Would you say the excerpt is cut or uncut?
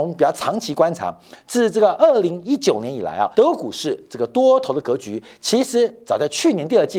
cut